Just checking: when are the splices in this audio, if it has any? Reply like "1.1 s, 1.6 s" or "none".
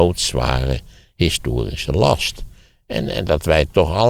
none